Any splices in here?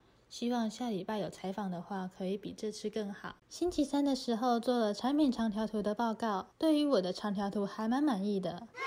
yes; 2 cuts; at 3.4 s, 6.5 s

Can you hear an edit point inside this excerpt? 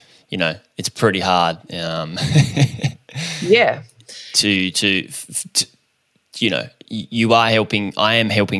no; 0 cuts

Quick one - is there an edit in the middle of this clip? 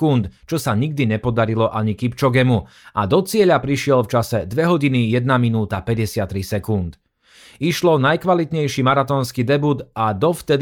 no; 0 cuts

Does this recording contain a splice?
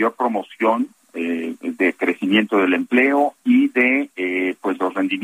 no; 0 cuts

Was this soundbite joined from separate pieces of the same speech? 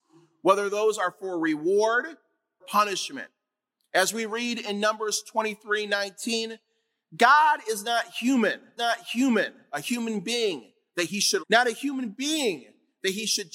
yes; 3 cuts; at 2.6 s, 8.8 s, 11.4 s

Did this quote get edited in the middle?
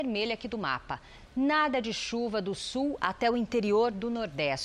no; 0 cuts

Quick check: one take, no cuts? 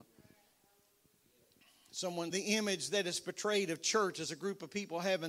no; 1 cut; at 2.3 s

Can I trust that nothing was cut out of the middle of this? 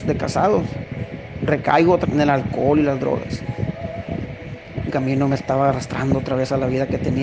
no; 2 cuts; at 2.0 s, 4.9 s

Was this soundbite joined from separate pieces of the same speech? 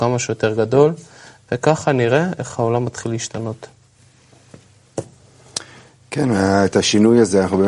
no; 0 cuts

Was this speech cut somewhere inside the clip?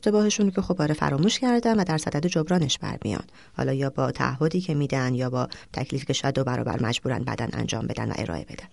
no; 0 cuts

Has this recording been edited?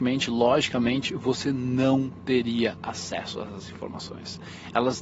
no; 0 cuts

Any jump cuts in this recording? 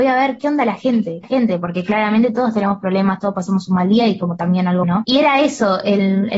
yes; 2 cuts; at 1.2 s, 4.8 s

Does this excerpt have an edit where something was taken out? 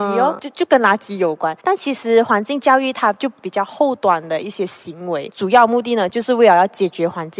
yes; 1 cut; at 1.6 s

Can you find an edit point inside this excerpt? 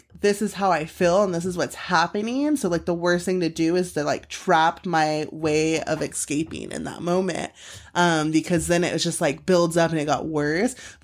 no; 0 cuts

